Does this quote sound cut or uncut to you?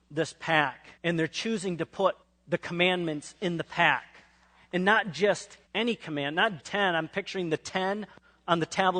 cut